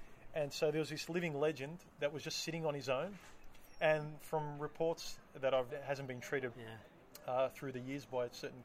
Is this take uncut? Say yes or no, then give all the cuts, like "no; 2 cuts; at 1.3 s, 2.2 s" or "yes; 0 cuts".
no; 2 cuts; at 5.7 s, 6.5 s